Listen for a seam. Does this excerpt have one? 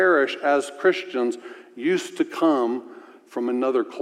no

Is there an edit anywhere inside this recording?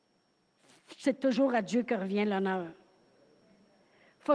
no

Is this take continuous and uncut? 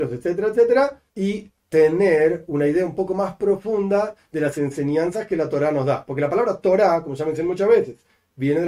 no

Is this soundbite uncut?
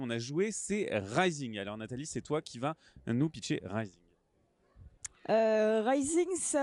yes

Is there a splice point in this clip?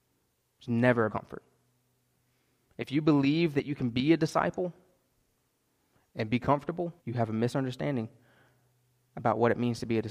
yes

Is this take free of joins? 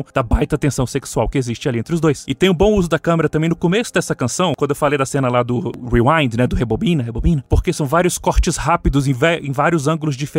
yes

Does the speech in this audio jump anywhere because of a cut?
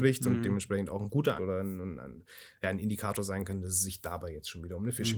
yes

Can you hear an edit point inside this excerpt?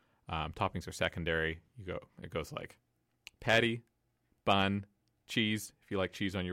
no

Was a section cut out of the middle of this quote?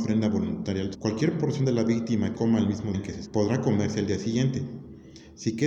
yes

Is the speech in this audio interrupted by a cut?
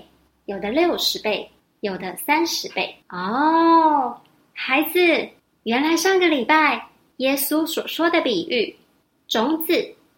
yes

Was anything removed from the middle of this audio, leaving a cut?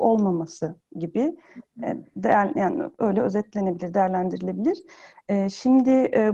no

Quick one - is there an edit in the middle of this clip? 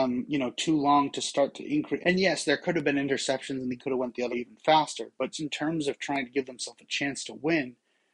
yes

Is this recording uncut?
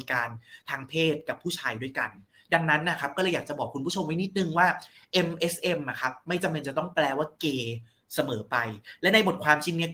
yes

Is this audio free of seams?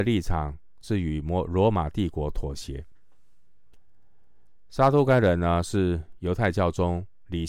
yes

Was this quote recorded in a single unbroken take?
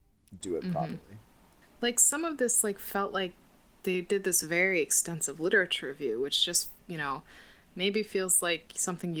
yes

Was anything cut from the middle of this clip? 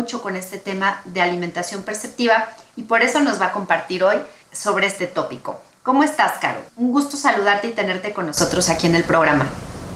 yes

